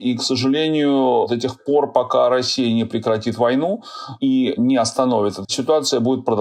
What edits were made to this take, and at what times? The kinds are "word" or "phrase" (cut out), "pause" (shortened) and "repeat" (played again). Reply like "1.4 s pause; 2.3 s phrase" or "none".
5.4 s word